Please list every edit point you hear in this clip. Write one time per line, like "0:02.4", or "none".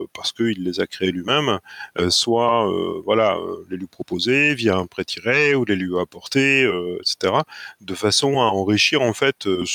none